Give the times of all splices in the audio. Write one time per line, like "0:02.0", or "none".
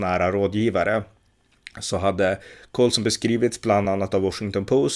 none

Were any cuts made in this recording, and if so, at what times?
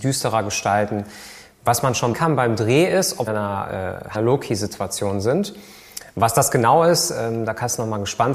0:02.1
0:03.3
0:04.1

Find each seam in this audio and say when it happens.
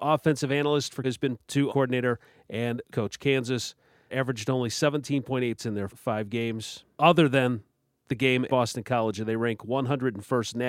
0:01.0
0:01.4
0:01.7
0:02.9
0:04.1
0:05.6
0:05.9
0:07.0
0:08.5

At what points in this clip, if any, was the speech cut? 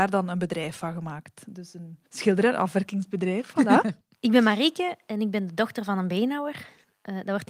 0:02.1
0:04.0

